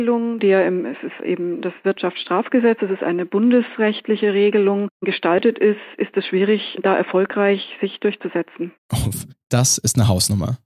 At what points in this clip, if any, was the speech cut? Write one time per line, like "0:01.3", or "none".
0:08.8